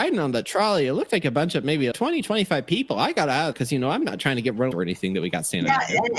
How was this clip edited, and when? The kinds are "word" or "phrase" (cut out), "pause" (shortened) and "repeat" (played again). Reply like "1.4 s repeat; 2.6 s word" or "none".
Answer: 1.9 s word; 3.5 s word; 4.7 s phrase